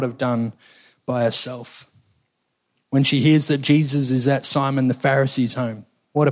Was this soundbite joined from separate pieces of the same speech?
no; 0 cuts

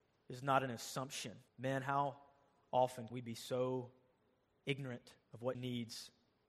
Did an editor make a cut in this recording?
yes; 4 cuts; at 1.5 s, 3.1 s, 5.2 s, 5.5 s

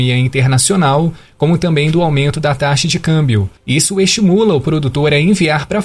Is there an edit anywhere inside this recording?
yes; 1 cut; at 3.6 s

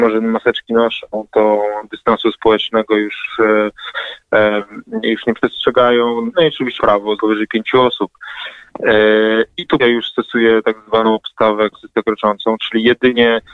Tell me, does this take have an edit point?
yes; 6 cuts; at 6.3 s, 6.8 s, 7.2 s, 9.8 s, 11.7 s, 12.6 s

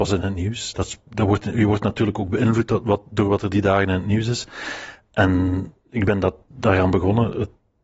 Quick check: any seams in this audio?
no; 0 cuts

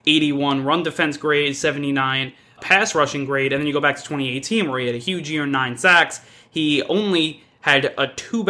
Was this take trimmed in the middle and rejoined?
yes; 1 cut; at 2.6 s

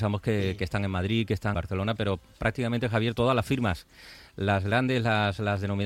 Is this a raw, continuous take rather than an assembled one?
no; 1 cut; at 1.5 s

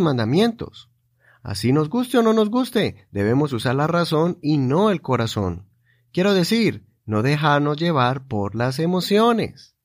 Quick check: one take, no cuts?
yes; 0 cuts

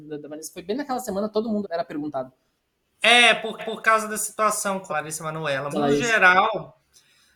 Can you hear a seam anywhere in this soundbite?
yes; 4 cuts; at 1.6 s, 3.6 s, 4.9 s, 5.7 s

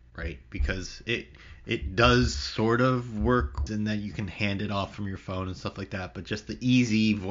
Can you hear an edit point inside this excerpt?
yes; 1 cut; at 3.7 s

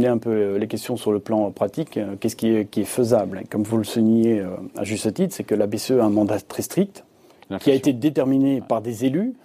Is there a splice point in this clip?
no; 0 cuts

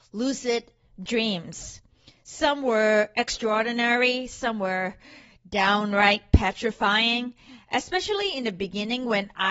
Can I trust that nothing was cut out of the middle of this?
yes; 0 cuts

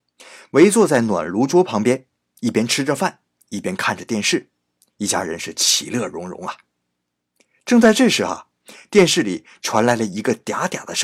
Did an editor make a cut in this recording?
no; 0 cuts

